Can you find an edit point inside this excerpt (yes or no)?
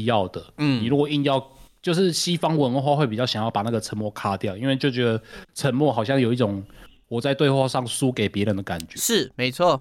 no